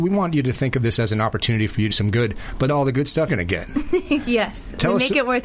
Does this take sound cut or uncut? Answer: cut